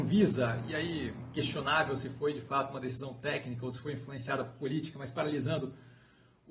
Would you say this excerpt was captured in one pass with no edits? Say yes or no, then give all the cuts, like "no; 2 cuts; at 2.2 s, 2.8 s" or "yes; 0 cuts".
yes; 0 cuts